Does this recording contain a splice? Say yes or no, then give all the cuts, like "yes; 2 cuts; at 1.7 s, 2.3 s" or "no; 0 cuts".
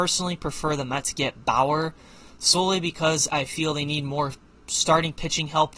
no; 0 cuts